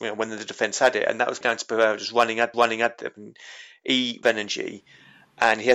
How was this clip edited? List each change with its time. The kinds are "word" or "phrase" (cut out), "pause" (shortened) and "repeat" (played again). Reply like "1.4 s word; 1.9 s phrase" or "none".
1.4 s word; 2.5 s repeat; 4.2 s phrase